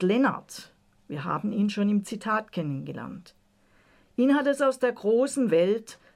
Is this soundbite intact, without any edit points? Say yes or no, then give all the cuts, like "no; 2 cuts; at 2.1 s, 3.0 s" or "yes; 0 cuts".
yes; 0 cuts